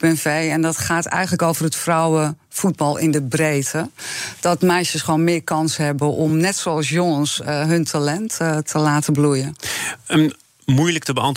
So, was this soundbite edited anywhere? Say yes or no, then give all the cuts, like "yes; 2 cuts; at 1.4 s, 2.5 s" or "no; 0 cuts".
no; 0 cuts